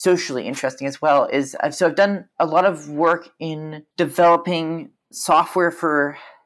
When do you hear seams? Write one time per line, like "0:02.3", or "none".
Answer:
0:03.9